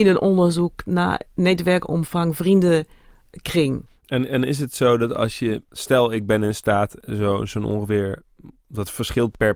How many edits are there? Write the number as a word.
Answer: zero